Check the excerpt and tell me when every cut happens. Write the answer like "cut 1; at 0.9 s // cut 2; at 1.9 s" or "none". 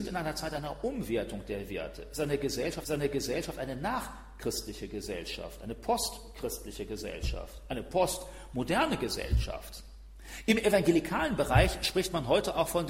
cut 1; at 2.8 s